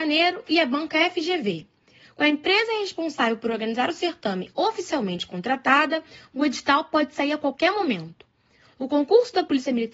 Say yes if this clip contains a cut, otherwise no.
no